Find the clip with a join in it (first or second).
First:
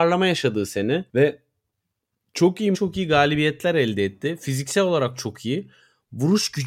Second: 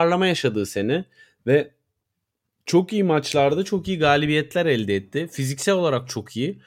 first